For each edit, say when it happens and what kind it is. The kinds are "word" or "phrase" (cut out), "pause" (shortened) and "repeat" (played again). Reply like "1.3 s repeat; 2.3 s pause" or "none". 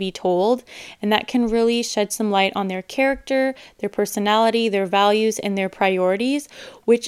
none